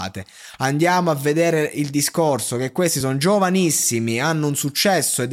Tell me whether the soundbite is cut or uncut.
uncut